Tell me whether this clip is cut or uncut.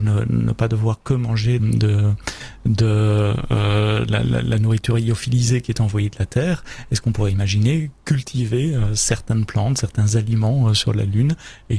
cut